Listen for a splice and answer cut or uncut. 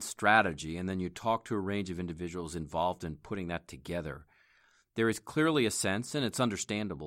uncut